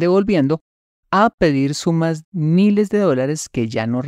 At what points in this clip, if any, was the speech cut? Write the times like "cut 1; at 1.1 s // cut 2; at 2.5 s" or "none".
cut 1; at 2.2 s